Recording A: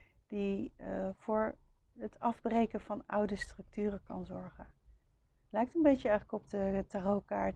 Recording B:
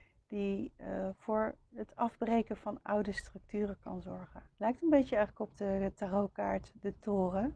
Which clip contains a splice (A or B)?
B